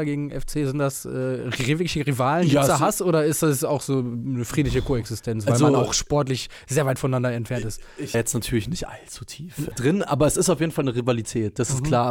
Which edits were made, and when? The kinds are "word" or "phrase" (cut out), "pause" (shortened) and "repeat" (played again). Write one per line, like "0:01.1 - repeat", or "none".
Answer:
0:08.1 - phrase
0:09.7 - word

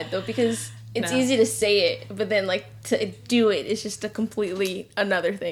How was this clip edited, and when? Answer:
none

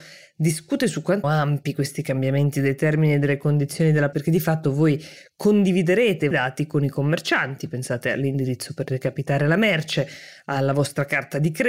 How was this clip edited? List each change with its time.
0:01.2 - word
0:04.1 - word
0:06.3 - word

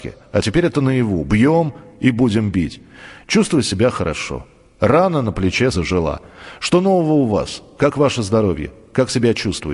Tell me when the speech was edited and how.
0:05.7 - word

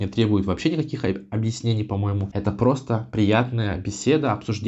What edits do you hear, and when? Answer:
none

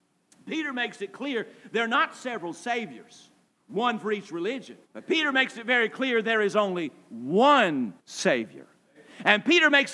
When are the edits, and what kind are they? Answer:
0:04.8 - pause
0:08.0 - pause

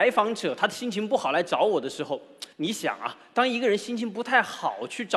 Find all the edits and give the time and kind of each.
0:02.5 - pause

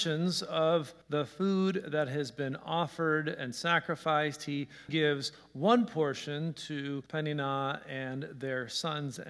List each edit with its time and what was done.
0:01.0 - pause
0:04.9 - word
0:07.1 - pause

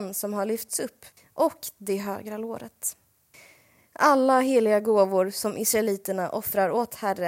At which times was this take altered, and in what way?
none

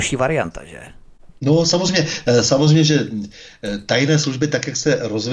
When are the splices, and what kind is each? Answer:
none

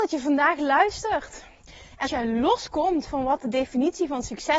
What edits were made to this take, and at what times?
0:02.0 - word

